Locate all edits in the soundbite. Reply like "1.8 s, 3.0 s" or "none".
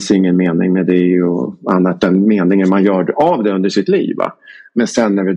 none